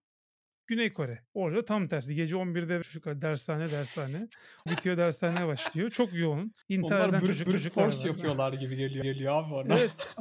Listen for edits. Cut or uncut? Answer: cut